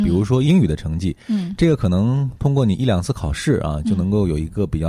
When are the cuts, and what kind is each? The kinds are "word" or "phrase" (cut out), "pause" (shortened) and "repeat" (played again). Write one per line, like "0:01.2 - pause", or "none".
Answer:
none